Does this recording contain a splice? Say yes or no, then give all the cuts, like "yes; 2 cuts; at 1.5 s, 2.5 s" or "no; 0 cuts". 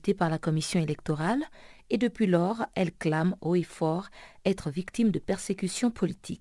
no; 0 cuts